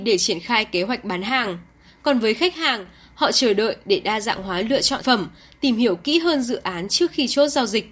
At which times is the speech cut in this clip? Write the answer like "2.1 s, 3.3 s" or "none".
5.0 s

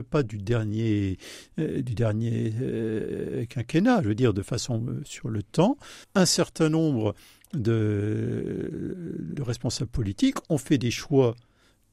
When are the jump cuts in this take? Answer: 6.0 s, 9.3 s

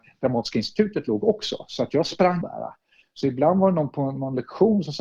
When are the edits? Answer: 2.4 s

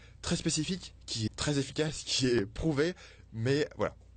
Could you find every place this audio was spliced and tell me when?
1.3 s

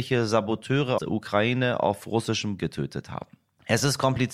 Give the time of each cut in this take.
1.0 s, 2.6 s

